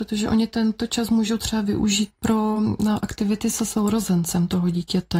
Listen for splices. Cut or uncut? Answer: uncut